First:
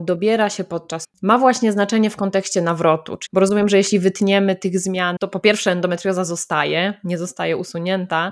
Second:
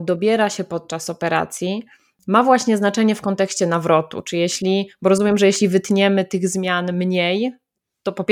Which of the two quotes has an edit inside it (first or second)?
first